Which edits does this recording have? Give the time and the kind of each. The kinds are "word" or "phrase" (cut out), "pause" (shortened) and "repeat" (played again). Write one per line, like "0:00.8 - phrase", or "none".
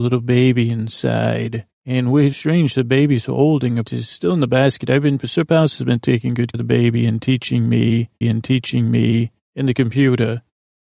0:01.7 - pause
0:02.3 - word
0:03.8 - word
0:05.2 - word
0:06.5 - word
0:08.2 - repeat